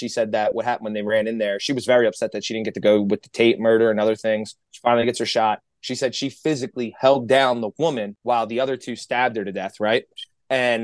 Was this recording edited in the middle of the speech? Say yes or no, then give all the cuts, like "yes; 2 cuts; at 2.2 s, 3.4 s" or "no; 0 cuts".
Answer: yes; 1 cut; at 4.6 s